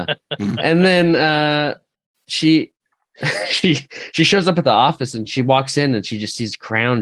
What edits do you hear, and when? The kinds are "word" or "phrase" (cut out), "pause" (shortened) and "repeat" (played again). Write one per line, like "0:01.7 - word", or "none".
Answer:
0:05.3 - word